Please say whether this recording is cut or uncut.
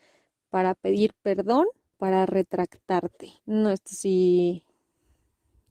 cut